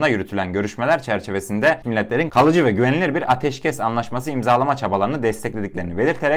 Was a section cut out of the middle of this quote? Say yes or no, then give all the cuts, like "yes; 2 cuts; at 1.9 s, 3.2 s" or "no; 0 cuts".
yes; 1 cut; at 1.8 s